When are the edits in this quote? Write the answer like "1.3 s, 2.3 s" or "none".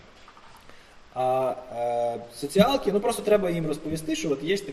none